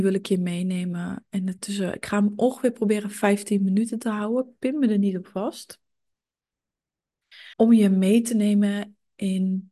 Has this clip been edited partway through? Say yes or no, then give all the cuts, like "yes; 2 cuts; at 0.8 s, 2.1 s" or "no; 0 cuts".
yes; 1 cut; at 7.5 s